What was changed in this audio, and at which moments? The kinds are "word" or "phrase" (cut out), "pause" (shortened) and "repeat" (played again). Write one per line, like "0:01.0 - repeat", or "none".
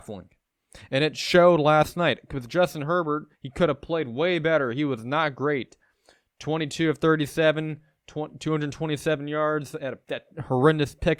0:03.3 - pause
0:10.0 - pause